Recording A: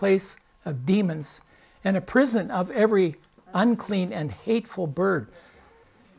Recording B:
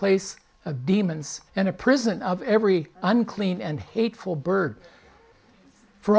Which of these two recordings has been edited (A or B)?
B